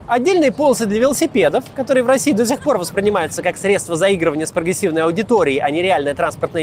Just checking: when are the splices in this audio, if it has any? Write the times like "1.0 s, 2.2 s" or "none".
none